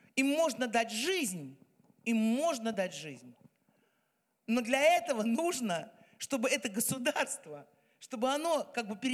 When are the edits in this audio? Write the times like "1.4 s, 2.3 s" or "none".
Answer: none